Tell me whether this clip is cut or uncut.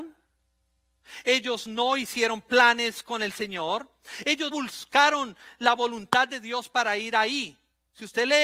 cut